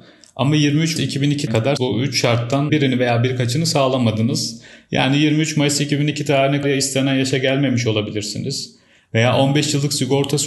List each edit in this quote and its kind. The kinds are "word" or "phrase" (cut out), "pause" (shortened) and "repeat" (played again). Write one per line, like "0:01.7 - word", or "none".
0:01.0 - word
0:01.5 - word
0:01.8 - word
0:02.7 - word
0:06.6 - word